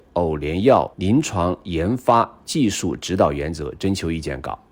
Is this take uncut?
no; 1 cut; at 0.9 s

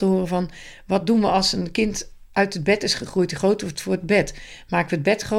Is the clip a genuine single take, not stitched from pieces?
yes; 0 cuts

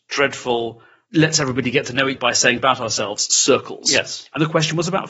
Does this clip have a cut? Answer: yes; 2 cuts; at 2.2 s, 2.6 s

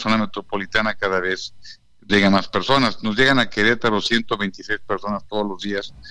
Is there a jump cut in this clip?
yes; 1 cut; at 2.1 s

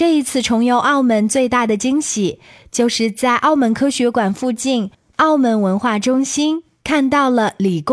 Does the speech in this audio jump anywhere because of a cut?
no; 0 cuts

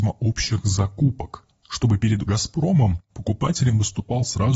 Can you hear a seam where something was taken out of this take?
yes; 1 cut; at 2.3 s

